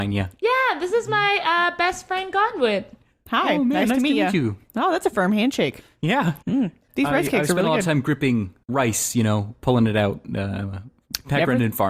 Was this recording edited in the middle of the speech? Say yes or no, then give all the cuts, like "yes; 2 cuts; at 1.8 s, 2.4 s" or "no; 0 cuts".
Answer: yes; 1 cut; at 6.4 s